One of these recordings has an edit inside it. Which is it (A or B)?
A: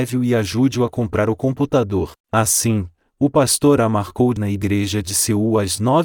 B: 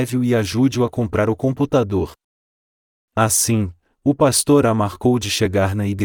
A